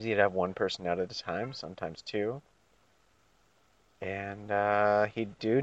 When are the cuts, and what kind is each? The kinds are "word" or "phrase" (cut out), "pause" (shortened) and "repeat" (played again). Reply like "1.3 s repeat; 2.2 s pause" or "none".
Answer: none